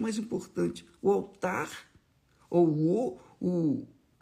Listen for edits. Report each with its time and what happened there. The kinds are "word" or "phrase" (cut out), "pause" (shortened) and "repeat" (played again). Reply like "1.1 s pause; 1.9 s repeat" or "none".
none